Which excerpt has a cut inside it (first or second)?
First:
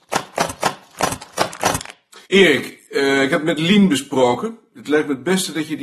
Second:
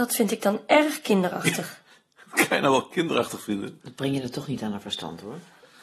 first